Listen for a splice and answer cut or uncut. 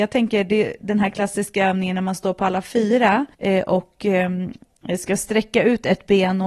cut